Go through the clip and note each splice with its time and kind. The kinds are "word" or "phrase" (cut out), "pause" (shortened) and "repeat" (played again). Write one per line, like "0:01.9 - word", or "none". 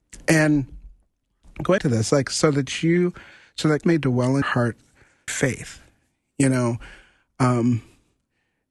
0:01.8 - word
0:02.1 - word
0:03.8 - word
0:04.4 - word
0:05.3 - word

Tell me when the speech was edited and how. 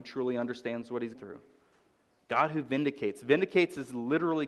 0:01.1 - word

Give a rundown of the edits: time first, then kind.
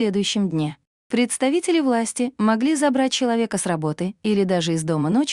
none

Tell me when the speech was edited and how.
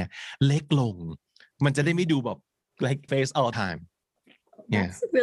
0:03.1 - phrase
0:03.5 - word

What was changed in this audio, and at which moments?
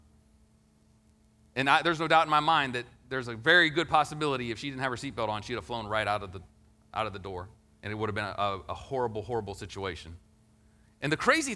none

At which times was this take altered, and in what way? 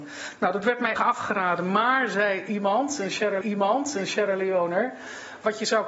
0:01.0 - word
0:03.4 - repeat

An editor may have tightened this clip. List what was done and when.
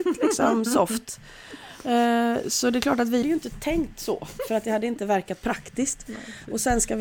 0:03.2 - word

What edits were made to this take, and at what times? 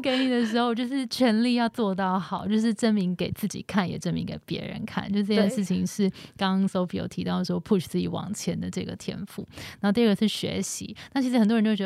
none

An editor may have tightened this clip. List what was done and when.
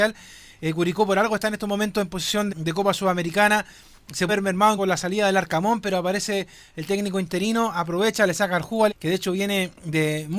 0:02.5 - word
0:04.3 - word
0:04.8 - word
0:08.9 - word

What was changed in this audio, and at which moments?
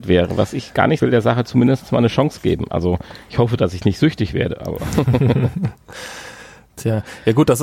0:01.0 - phrase

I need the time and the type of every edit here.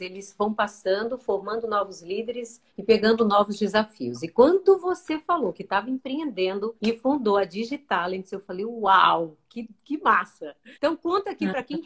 0:02.7 - pause
0:06.8 - pause
0:10.7 - pause

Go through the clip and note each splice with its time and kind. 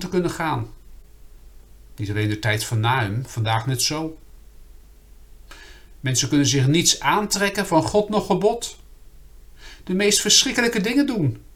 none

